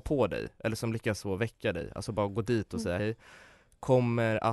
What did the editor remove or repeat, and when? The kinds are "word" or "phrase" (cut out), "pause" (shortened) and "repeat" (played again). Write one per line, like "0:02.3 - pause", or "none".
0:03.0 - word